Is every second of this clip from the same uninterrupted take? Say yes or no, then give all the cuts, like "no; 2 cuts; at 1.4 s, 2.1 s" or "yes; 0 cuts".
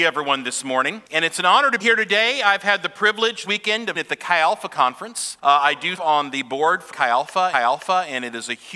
no; 8 cuts; at 1.1 s, 1.8 s, 3.4 s, 3.9 s, 5.4 s, 6.0 s, 6.9 s, 7.5 s